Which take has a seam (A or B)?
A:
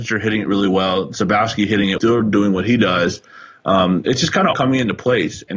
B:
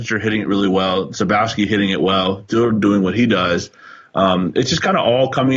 A